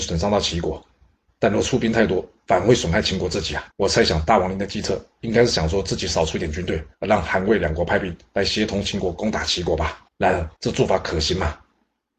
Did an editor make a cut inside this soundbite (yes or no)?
yes